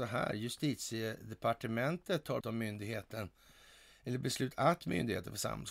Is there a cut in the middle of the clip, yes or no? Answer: yes